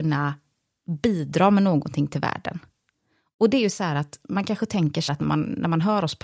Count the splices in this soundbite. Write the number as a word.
one